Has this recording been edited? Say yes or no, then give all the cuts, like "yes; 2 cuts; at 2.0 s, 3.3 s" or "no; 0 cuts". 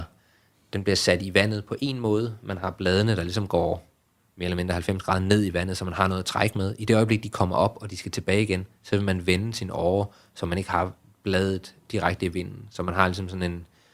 no; 0 cuts